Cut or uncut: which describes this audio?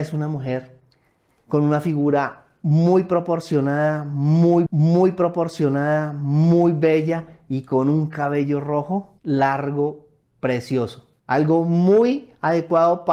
cut